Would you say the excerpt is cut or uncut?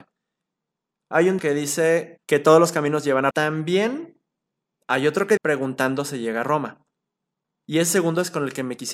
cut